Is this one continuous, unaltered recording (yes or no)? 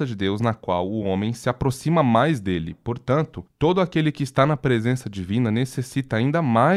yes